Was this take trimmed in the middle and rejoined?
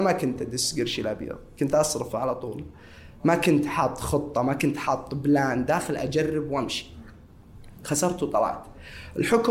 no; 0 cuts

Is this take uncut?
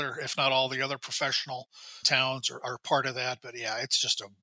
no; 1 cut; at 2.0 s

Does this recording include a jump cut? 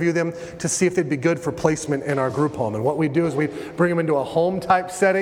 no; 0 cuts

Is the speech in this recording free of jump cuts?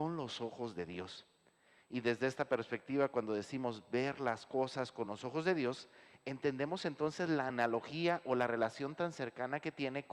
yes; 0 cuts

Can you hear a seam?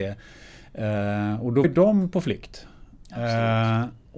yes; 1 cut; at 1.6 s

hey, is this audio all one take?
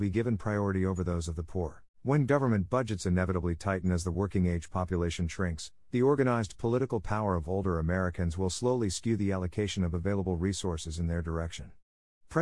no; 1 cut; at 1.9 s

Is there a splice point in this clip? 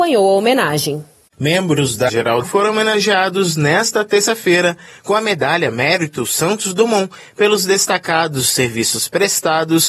yes; 2 cuts; at 2.1 s, 2.4 s

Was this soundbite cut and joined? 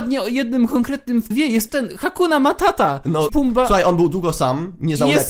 yes; 3 cuts; at 1.3 s, 1.7 s, 3.3 s

